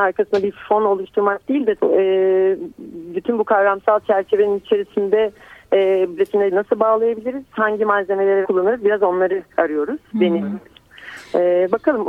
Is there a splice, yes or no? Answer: yes